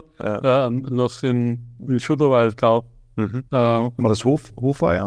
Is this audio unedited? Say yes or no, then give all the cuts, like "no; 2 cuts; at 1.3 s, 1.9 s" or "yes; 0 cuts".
no; 1 cut; at 3.5 s